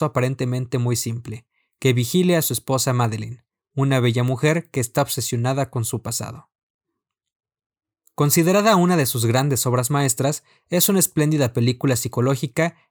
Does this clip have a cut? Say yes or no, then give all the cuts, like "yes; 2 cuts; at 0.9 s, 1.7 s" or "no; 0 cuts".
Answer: no; 0 cuts